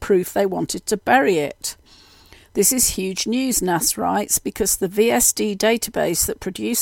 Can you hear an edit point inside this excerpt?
no; 0 cuts

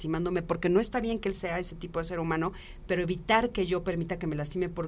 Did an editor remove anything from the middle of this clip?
no; 0 cuts

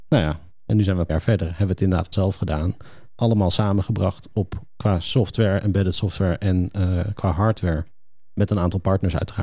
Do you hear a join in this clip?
yes; 2 cuts; at 1.1 s, 2.1 s

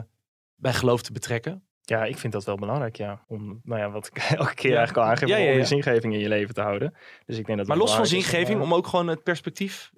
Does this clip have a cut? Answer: yes; 2 cuts; at 1.7 s, 3.2 s

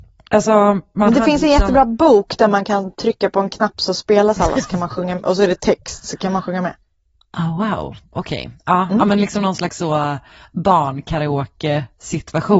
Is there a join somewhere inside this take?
no; 0 cuts

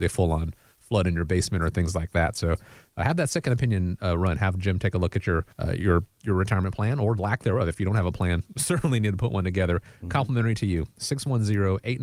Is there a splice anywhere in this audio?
yes; 1 cut; at 5.5 s

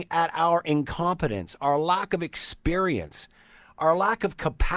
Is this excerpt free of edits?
yes; 0 cuts

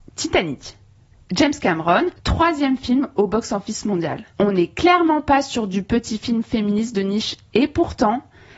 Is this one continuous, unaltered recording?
no; 2 cuts; at 2.1 s, 4.3 s

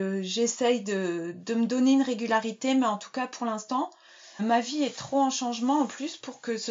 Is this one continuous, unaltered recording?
no; 1 cut; at 4.4 s

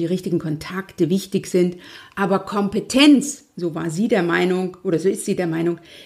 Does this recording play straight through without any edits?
yes; 0 cuts

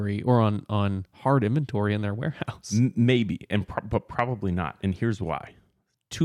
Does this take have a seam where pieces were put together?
no; 0 cuts

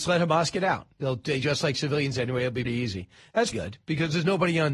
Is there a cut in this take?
yes; 2 cuts; at 2.6 s, 3.5 s

